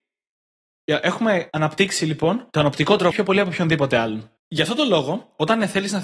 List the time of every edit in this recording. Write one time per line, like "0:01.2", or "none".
0:01.5
0:02.5
0:03.1
0:04.4